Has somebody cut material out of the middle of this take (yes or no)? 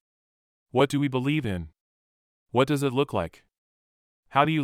no